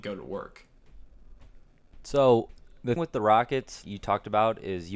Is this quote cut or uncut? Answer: cut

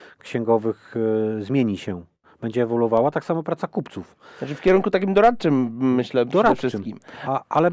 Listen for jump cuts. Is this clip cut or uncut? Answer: uncut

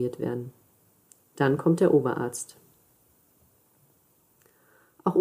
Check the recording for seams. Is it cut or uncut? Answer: uncut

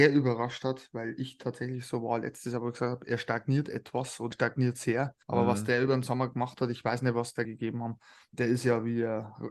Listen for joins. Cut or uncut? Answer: cut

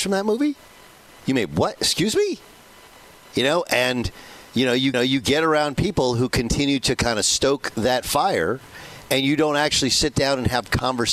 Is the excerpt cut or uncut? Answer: cut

